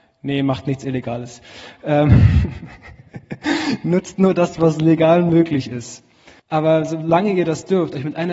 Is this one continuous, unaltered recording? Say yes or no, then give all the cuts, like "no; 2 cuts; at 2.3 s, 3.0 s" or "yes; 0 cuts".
no; 1 cut; at 6.4 s